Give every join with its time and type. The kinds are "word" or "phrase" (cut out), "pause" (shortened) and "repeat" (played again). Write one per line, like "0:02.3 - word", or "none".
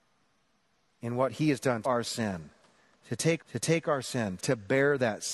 0:01.8 - phrase
0:03.4 - repeat
0:04.4 - word

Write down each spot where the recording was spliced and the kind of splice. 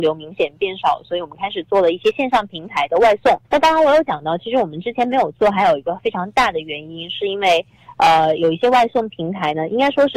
0:03.4 - pause

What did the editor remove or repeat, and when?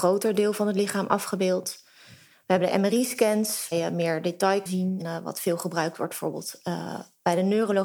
0:03.7 - word
0:04.7 - word
0:05.0 - word

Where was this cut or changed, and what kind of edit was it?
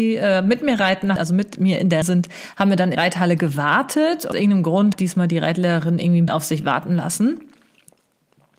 0:01.2 - word
0:02.0 - word
0:02.9 - word
0:04.3 - word
0:04.9 - word
0:06.3 - word

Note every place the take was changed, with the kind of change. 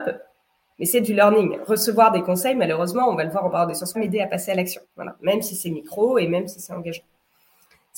0:03.9 - phrase
0:04.8 - pause

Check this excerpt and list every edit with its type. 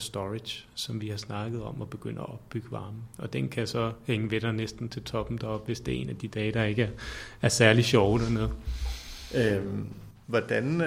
none

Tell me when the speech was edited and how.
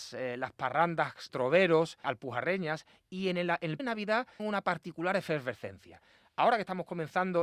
0:01.3 - word
0:02.0 - word
0:03.8 - word
0:04.4 - word

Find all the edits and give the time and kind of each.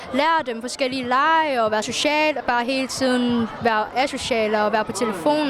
0:01.8 - word
0:02.4 - word

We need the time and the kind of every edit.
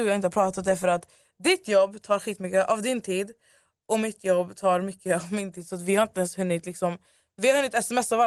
none

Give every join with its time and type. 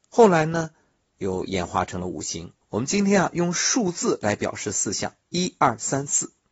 0:02.6 - pause
0:05.2 - pause

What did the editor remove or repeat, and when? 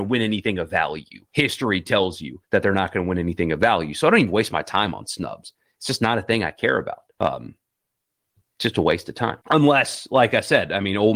0:01.3 - pause
0:02.4 - pause
0:07.1 - pause
0:09.4 - pause

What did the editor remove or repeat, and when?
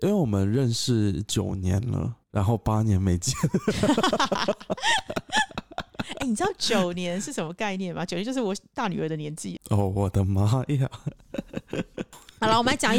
0:02.2 - pause
0:09.6 - word

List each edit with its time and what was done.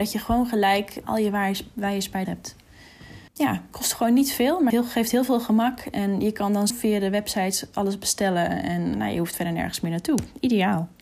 0:01.0 - word
0:02.2 - phrase
0:03.3 - pause
0:04.7 - word
0:06.7 - word
0:08.9 - word

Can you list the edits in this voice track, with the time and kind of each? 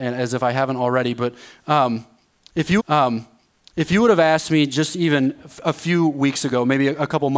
0:02.8 - repeat

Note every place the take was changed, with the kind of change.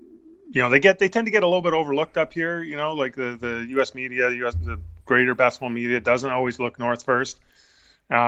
0:05.0 - pause

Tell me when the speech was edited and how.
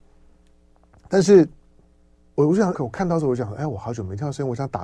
0:01.9 - pause
0:02.7 - word

